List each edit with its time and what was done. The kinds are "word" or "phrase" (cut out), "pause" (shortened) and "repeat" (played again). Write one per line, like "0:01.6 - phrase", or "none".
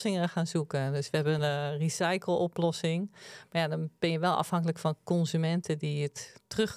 0:01.4 - word